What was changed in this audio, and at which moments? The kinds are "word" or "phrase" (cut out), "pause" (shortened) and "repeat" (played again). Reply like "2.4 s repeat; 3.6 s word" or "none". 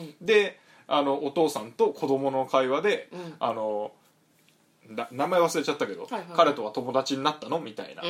none